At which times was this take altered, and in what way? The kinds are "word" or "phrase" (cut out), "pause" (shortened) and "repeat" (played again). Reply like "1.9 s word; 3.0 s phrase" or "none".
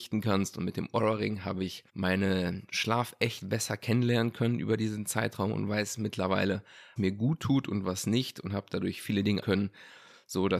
1.9 s pause; 7.0 s word; 9.4 s word